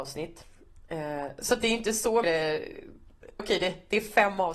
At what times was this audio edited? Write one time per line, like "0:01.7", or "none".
0:02.2
0:03.4